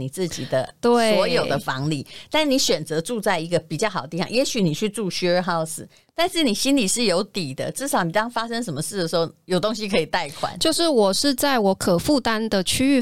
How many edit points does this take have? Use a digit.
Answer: 0